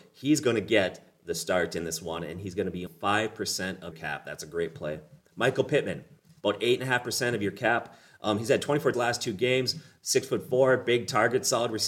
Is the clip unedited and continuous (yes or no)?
no